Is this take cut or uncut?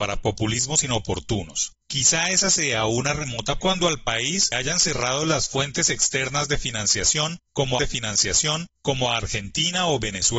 cut